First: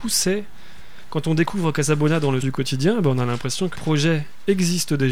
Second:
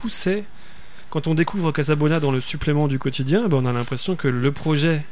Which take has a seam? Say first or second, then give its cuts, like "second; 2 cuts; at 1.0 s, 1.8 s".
first; 2 cuts; at 2.4 s, 3.8 s